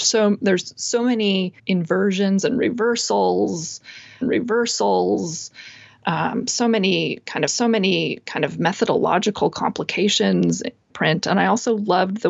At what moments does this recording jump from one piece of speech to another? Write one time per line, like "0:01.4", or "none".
0:01.6
0:04.2
0:07.5
0:10.9

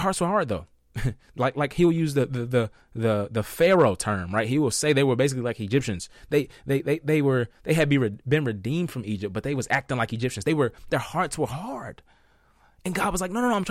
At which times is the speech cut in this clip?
none

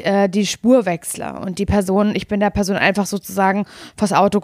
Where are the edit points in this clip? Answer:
none

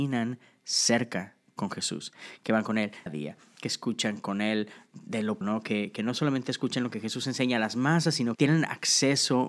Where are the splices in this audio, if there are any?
0:03.1
0:05.4
0:08.3

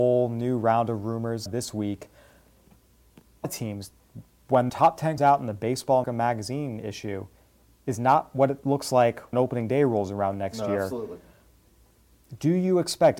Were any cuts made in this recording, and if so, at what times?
0:01.5
0:03.4
0:04.7
0:05.2
0:06.0
0:09.3

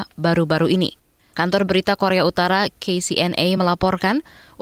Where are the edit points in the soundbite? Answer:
none

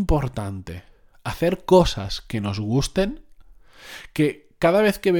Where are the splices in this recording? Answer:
none

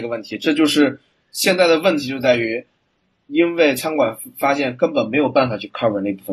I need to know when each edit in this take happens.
none

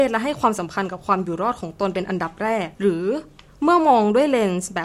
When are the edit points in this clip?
0:02.7

